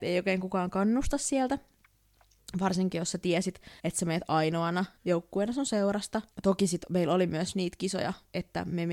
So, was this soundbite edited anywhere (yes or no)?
yes